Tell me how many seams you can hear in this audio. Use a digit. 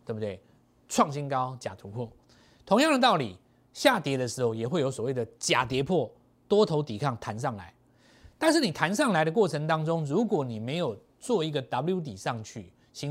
0